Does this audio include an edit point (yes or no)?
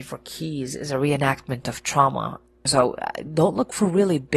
no